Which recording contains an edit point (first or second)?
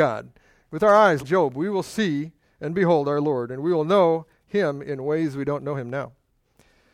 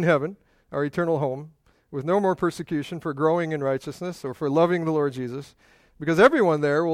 first